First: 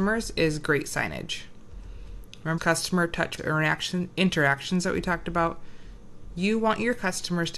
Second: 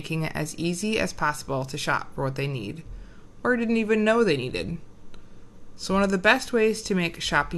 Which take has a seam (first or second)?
first